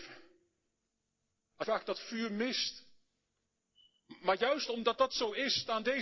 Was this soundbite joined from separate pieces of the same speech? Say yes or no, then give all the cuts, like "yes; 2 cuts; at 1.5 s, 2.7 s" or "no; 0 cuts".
yes; 1 cut; at 1.6 s